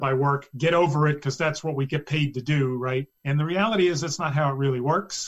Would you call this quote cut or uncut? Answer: cut